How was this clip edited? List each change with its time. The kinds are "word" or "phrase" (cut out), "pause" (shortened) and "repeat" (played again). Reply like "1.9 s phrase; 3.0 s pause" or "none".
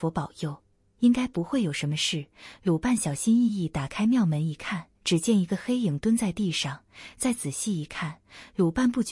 5.0 s pause